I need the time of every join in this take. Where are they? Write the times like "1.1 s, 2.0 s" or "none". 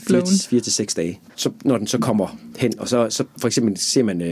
none